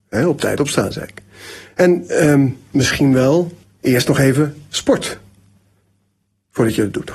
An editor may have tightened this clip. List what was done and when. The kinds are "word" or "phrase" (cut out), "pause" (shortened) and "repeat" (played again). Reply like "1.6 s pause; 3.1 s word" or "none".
3.6 s pause